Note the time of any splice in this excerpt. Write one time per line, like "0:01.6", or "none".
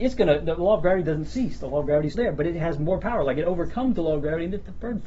0:02.1